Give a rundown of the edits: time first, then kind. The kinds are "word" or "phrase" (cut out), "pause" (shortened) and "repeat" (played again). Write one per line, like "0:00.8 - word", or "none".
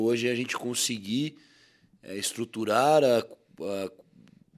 none